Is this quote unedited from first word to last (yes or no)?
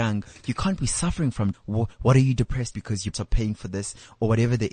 no